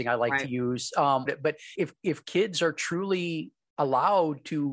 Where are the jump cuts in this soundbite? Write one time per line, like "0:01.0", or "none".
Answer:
0:01.3
0:01.8